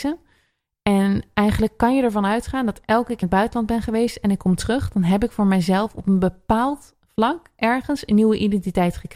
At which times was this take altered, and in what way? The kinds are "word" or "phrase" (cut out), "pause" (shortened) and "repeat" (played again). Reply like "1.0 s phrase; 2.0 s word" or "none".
3.2 s phrase

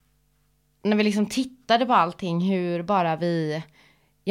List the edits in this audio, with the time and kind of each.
none

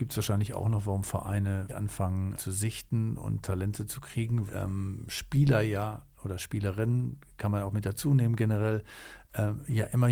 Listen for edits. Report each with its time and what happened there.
1.7 s word; 2.3 s word; 4.5 s phrase

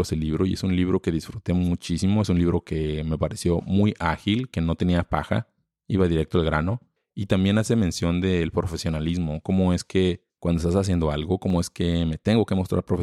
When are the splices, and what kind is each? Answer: none

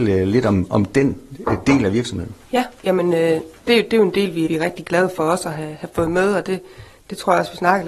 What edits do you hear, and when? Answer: 2.4 s pause; 4.5 s word

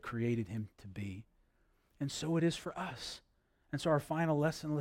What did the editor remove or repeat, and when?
none

